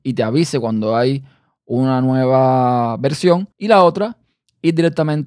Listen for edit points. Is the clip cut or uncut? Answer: cut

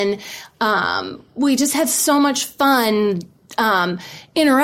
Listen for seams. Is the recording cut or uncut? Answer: uncut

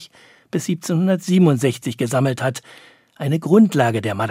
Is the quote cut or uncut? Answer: uncut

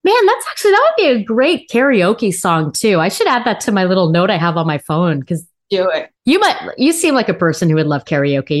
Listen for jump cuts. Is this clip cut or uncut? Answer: cut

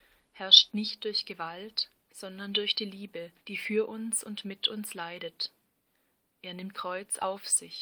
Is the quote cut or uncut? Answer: cut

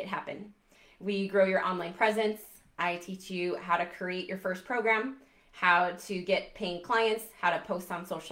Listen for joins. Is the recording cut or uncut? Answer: uncut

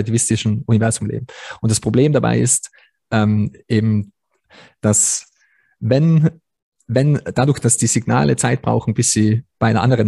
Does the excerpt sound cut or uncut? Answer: uncut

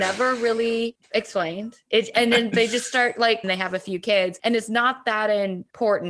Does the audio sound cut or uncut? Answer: cut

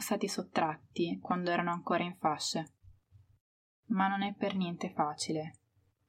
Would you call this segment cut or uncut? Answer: uncut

